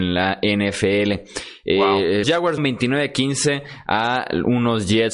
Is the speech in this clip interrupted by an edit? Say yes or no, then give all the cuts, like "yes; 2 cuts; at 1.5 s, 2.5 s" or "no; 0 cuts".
yes; 2 cuts; at 2.2 s, 2.6 s